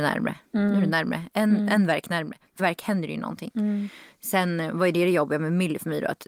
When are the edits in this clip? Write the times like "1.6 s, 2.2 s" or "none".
2.6 s